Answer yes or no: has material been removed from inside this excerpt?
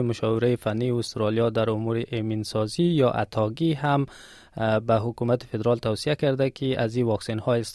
no